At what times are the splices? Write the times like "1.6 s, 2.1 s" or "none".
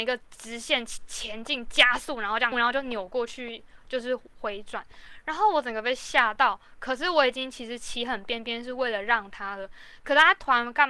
2.5 s